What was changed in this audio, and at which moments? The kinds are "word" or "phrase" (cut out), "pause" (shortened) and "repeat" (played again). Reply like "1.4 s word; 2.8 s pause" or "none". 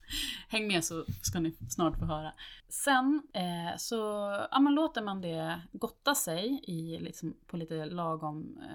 none